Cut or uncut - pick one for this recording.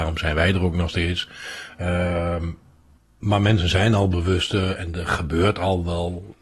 cut